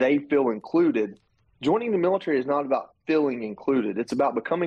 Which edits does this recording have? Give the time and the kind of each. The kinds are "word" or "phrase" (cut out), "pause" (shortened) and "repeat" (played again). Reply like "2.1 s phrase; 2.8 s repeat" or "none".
none